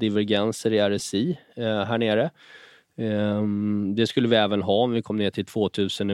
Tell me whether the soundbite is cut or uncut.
uncut